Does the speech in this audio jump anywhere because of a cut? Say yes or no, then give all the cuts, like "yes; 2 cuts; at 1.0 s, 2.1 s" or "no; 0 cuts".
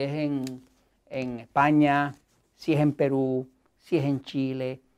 no; 0 cuts